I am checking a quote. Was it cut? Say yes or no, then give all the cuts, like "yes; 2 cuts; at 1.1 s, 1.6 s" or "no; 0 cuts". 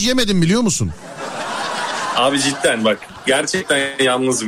no; 0 cuts